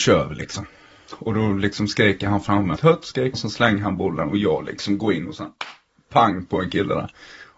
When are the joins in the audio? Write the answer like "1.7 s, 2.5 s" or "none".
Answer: 2.8 s, 3.3 s